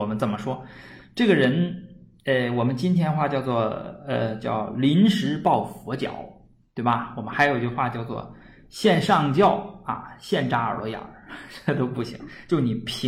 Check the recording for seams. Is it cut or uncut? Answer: uncut